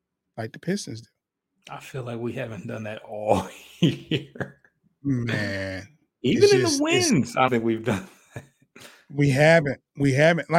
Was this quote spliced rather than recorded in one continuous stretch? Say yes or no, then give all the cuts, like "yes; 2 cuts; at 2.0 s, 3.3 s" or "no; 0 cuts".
yes; 1 cut; at 7.5 s